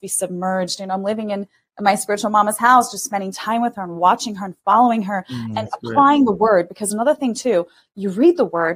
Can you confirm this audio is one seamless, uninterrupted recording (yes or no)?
yes